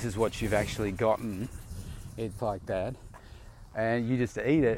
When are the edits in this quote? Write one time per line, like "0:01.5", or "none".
0:02.4